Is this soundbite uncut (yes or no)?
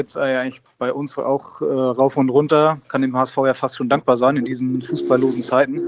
yes